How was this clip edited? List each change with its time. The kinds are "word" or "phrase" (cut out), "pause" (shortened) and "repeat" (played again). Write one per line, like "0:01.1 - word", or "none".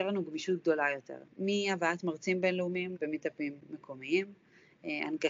0:01.3 - pause
0:03.0 - word